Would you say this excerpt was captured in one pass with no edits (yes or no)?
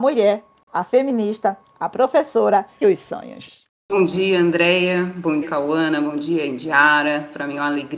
no